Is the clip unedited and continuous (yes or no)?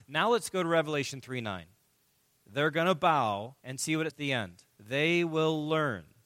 no